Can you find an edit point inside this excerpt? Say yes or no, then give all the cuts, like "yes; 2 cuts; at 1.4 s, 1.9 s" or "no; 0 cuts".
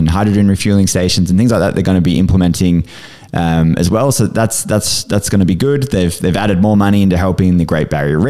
no; 0 cuts